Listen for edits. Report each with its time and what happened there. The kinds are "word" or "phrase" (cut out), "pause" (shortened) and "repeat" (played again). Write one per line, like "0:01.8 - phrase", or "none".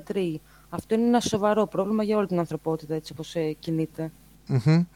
none